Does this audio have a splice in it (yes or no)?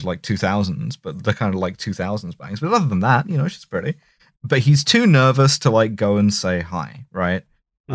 no